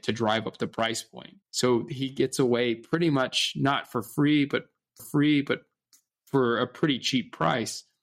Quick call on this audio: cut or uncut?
cut